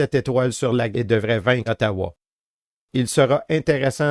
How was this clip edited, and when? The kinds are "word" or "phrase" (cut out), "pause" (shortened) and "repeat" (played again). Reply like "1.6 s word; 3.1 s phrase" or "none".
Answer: 0.9 s word; 1.7 s word